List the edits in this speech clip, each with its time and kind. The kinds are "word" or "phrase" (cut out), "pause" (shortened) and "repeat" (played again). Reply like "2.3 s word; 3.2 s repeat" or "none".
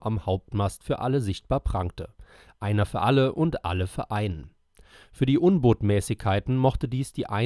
none